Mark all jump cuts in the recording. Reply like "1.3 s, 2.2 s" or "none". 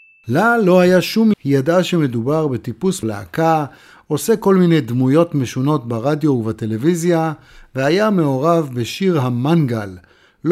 1.3 s, 3.0 s